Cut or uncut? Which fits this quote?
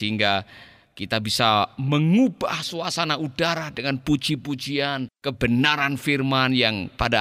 cut